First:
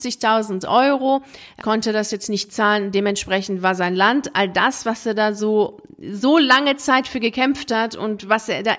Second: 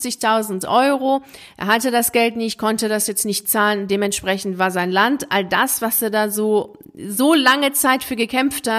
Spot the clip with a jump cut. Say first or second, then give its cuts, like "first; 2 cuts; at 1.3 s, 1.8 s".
first; 1 cut; at 1.6 s